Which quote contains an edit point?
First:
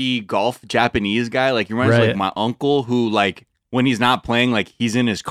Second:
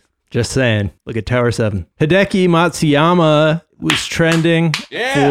second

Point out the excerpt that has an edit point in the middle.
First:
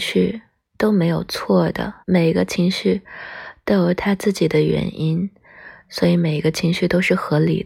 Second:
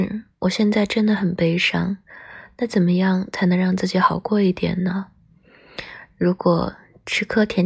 first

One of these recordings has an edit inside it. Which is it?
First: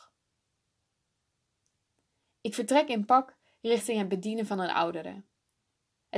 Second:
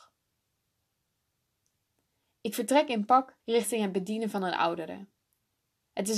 second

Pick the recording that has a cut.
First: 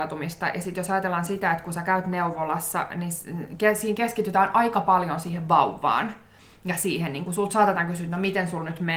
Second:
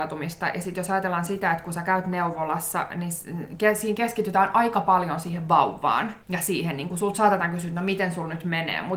second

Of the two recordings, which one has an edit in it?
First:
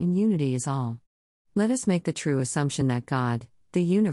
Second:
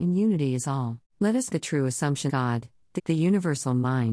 second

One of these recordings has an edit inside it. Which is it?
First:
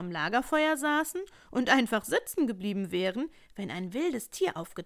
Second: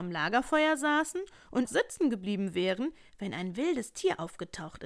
second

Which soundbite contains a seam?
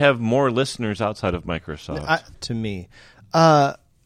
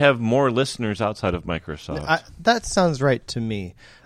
first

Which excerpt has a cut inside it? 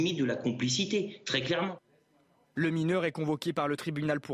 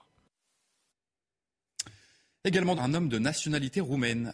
second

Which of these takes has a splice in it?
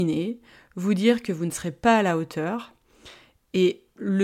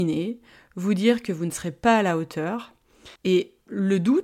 second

